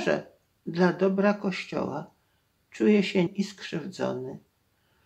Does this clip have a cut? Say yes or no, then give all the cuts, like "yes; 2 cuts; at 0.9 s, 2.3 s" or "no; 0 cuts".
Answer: yes; 1 cut; at 3.3 s